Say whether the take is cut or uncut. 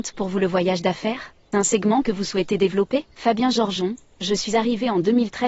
cut